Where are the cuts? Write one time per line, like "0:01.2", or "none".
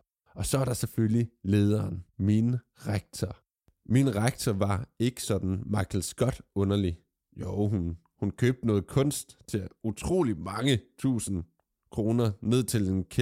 none